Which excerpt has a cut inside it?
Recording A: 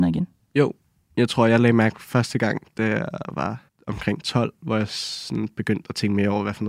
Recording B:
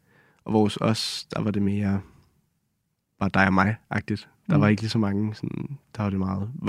A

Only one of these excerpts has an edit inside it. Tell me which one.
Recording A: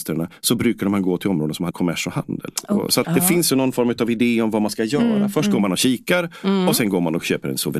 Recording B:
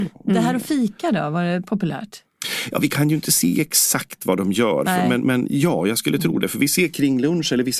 A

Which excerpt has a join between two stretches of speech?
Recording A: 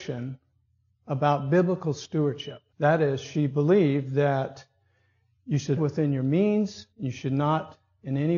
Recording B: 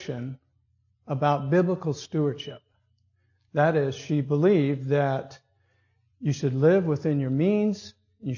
A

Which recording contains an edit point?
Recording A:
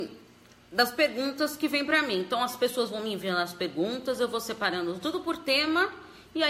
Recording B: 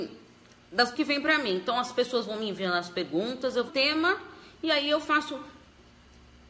B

